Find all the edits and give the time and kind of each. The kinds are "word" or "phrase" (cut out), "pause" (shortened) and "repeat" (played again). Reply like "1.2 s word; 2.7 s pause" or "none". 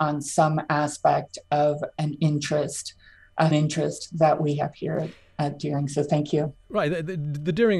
3.5 s word